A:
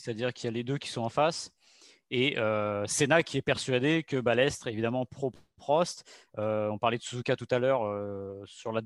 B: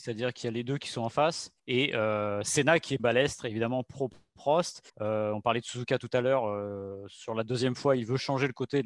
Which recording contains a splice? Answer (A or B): B